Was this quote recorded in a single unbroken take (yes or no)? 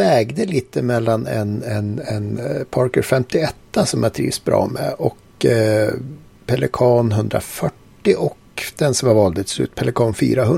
yes